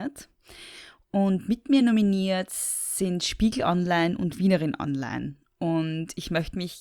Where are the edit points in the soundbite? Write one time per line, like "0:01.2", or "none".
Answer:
none